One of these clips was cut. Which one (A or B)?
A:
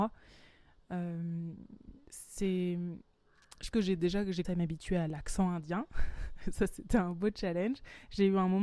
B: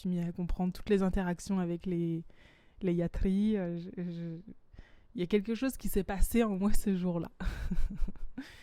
A